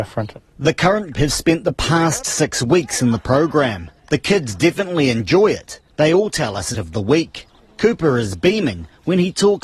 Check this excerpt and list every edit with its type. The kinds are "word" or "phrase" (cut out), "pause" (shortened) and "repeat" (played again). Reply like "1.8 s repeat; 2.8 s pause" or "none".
1.1 s word; 6.7 s phrase